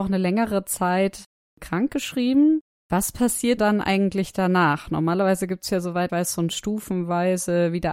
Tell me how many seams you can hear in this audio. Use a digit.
2